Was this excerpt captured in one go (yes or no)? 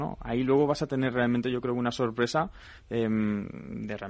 yes